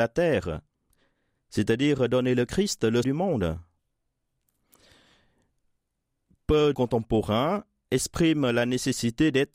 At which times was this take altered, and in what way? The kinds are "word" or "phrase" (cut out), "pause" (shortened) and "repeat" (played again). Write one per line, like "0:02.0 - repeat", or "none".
0:03.0 - word
0:06.7 - phrase